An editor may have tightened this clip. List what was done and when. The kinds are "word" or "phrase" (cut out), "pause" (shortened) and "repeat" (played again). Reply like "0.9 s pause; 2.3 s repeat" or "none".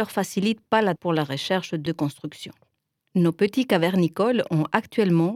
1.0 s word; 1.9 s word